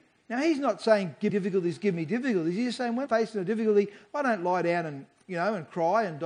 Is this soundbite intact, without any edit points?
no; 2 cuts; at 1.3 s, 3.1 s

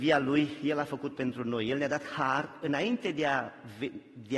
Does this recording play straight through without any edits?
no; 1 cut; at 1.1 s

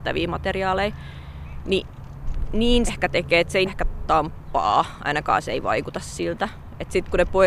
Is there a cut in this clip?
yes; 2 cuts; at 2.9 s, 3.7 s

